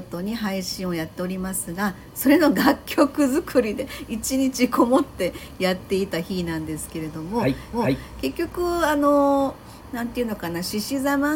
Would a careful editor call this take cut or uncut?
cut